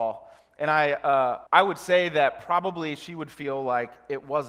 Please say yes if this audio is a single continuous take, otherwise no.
no